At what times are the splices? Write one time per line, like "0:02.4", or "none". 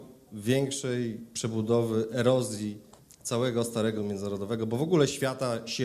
0:03.0
0:04.0